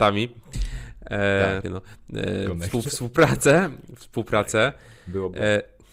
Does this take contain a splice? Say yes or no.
yes